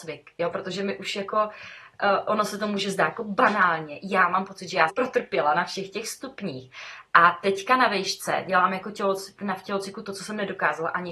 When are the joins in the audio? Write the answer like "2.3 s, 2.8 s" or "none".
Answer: 4.9 s